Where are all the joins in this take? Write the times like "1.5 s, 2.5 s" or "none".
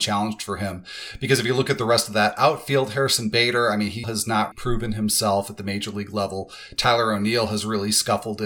4.0 s, 4.5 s